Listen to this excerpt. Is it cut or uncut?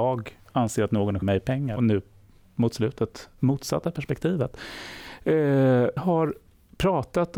cut